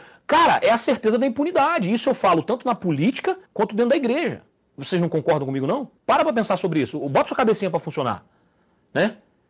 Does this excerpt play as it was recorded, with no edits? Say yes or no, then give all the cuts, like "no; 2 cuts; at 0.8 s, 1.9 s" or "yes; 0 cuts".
no; 3 cuts; at 3.5 s, 4.5 s, 6.0 s